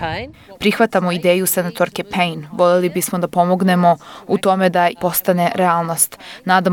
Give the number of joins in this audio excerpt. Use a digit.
1